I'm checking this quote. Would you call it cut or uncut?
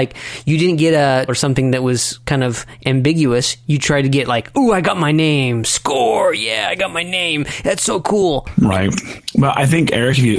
cut